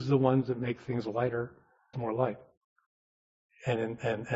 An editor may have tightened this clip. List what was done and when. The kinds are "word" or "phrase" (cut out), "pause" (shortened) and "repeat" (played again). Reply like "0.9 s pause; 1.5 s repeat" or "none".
1.9 s word